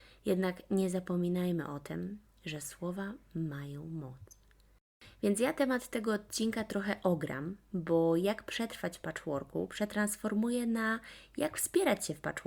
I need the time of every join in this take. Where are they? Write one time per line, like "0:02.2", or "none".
none